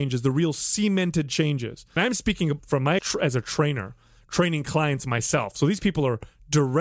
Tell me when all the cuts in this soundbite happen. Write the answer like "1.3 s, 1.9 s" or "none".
2.0 s, 2.6 s, 3.0 s